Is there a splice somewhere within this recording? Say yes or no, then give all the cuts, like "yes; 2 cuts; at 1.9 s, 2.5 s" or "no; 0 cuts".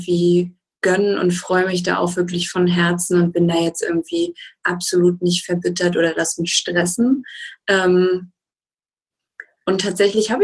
no; 0 cuts